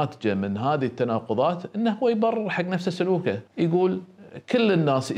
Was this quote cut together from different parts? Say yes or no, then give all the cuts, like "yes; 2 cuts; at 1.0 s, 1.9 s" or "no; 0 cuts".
yes; 1 cut; at 3.5 s